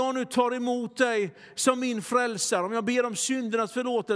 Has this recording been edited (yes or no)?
no